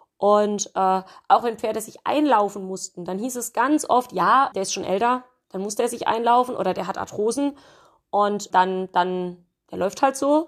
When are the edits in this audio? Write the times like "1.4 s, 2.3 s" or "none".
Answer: 4.5 s, 8.5 s